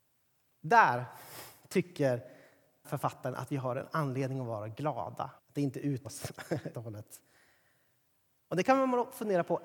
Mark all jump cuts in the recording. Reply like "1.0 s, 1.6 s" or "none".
2.8 s, 5.4 s, 6.0 s, 6.7 s